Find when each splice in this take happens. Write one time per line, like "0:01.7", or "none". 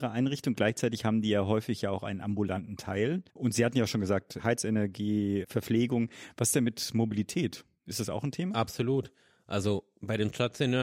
0:03.3